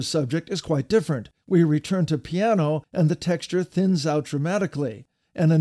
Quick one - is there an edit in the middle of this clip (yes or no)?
yes